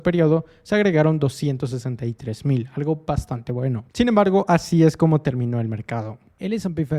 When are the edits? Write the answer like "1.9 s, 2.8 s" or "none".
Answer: 3.9 s